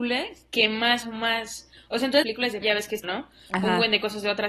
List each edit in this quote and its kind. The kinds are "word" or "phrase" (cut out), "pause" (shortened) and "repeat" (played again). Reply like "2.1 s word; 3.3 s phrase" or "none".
1.0 s word; 2.2 s word; 2.6 s word; 3.0 s word